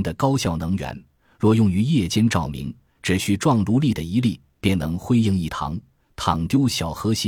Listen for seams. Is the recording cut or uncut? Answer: uncut